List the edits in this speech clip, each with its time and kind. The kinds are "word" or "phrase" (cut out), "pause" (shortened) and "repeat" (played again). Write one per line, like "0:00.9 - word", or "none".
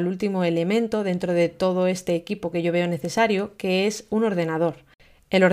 none